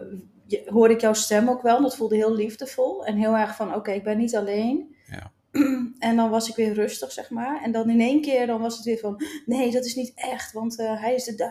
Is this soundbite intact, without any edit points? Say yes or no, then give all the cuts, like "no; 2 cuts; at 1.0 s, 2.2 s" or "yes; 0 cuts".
yes; 0 cuts